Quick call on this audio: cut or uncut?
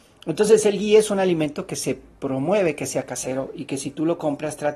uncut